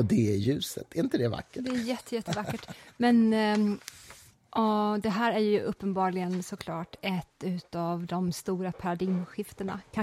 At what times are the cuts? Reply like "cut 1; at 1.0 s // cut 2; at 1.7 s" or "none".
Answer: none